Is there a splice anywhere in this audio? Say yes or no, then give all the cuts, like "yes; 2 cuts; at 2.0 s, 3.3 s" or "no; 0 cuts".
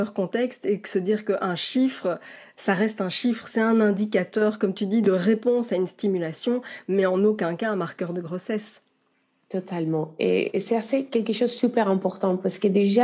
no; 0 cuts